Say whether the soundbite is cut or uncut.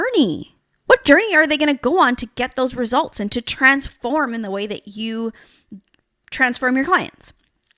uncut